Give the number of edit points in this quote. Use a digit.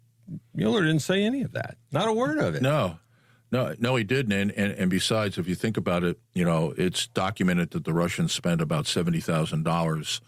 0